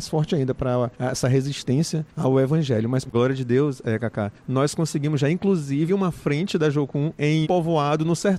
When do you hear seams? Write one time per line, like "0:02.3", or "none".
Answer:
0:03.1
0:05.9
0:07.4